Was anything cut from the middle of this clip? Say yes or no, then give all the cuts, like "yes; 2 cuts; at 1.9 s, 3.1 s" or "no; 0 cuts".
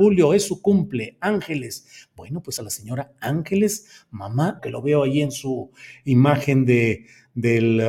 yes; 2 cuts; at 2.6 s, 4.6 s